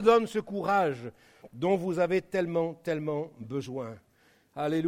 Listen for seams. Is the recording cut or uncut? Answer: uncut